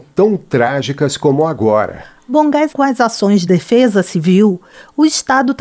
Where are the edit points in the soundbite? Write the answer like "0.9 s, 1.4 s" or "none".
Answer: 2.7 s, 3.5 s